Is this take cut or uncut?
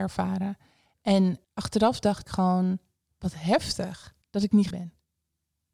cut